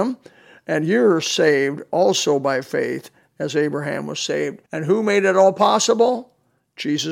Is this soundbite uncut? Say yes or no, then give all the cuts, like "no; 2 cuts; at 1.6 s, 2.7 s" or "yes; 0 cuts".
no; 1 cut; at 4.7 s